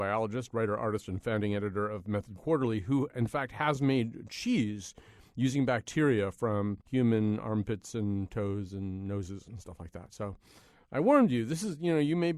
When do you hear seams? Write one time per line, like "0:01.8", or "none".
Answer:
0:06.8